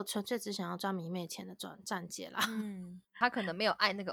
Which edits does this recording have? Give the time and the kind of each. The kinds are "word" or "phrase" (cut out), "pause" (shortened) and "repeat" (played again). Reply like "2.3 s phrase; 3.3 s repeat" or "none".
3.1 s pause